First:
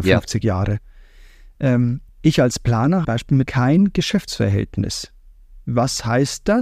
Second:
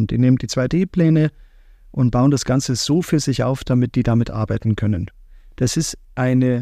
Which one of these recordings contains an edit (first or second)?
first